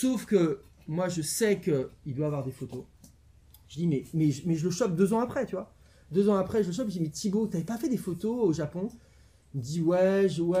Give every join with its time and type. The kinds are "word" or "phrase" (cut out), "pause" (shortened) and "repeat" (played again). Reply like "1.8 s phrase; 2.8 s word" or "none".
none